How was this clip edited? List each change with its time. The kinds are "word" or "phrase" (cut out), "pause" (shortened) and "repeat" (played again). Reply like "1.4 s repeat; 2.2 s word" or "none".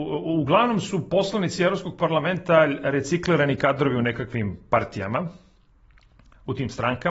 none